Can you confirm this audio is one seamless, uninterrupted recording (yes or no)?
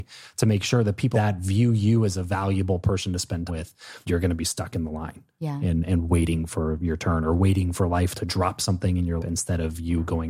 no